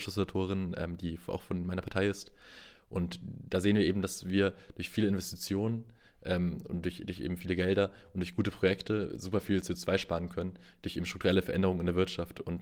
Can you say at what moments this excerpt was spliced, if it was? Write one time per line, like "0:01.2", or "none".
none